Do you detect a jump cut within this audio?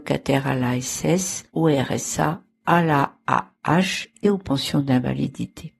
yes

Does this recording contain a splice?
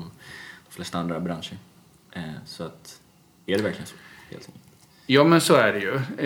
no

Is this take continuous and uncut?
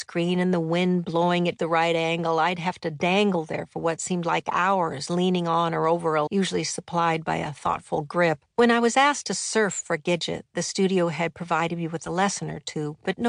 no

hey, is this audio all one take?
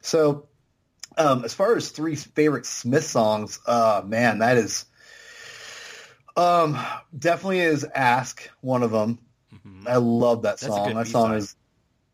yes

